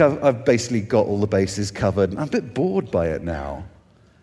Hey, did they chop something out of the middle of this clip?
no; 0 cuts

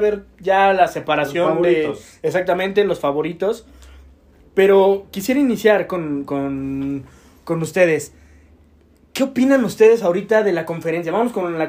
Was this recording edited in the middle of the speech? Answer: no; 0 cuts

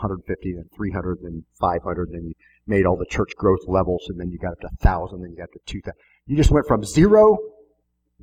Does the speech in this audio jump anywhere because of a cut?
no; 0 cuts

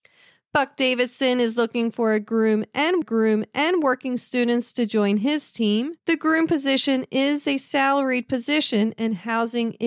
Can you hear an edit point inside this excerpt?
yes; 2 cuts; at 3.0 s, 6.0 s

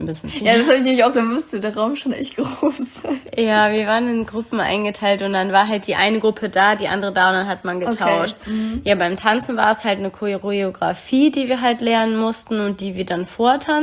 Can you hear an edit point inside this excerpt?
yes; 1 cut; at 1.1 s

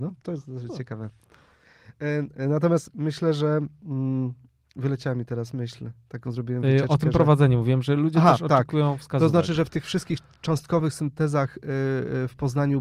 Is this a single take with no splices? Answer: yes; 0 cuts

